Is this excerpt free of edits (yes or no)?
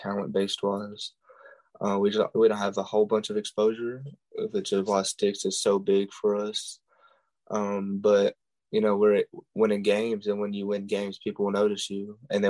yes